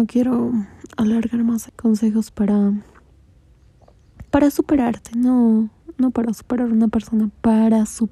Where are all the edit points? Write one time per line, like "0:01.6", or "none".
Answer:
0:01.7
0:04.3